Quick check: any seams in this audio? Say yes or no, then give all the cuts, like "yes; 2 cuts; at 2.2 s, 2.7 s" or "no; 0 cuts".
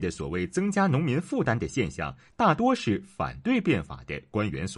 no; 0 cuts